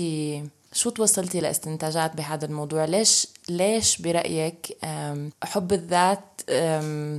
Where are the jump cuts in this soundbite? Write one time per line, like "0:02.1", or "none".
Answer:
none